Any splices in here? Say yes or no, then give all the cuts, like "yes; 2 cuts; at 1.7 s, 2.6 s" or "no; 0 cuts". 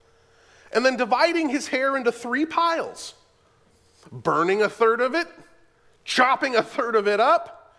no; 0 cuts